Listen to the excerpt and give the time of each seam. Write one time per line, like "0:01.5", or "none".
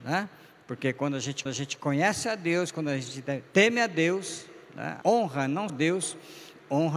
0:01.5
0:04.6
0:05.0
0:05.7